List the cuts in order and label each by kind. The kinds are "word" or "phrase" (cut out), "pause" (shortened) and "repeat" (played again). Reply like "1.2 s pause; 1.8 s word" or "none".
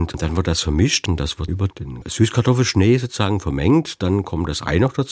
1.5 s word